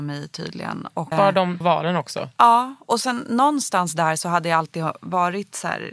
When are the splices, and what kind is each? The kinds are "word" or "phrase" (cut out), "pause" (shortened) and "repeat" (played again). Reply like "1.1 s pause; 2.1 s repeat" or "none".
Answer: 1.1 s word; 1.6 s word